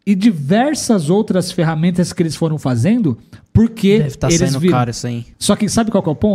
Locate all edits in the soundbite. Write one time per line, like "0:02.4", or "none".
0:05.3